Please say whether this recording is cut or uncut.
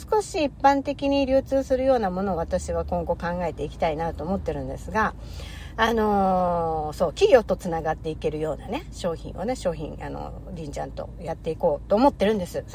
uncut